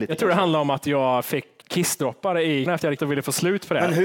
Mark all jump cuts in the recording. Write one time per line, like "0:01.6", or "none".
0:01.6
0:02.7
0:03.0